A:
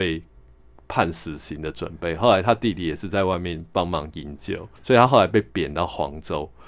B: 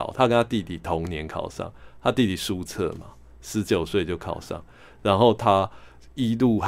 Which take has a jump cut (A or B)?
A